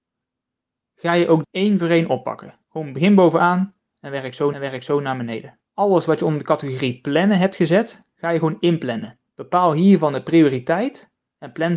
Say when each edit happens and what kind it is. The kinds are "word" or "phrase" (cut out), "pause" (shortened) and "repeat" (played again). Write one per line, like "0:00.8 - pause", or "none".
0:01.4 - word
0:02.6 - pause
0:04.5 - repeat
0:05.7 - pause
0:09.3 - pause